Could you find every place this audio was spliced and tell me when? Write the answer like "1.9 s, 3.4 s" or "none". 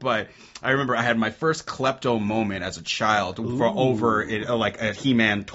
none